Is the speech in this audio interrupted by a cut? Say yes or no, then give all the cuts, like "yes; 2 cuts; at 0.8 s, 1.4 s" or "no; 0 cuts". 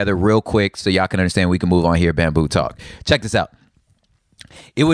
no; 0 cuts